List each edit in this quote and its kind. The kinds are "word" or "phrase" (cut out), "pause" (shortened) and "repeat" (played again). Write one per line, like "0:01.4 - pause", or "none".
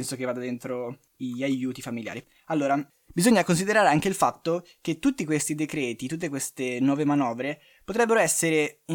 0:01.1 - pause